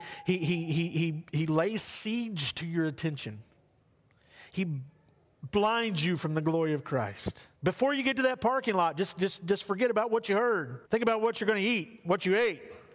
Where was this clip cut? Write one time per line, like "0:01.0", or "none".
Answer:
0:07.6
0:10.9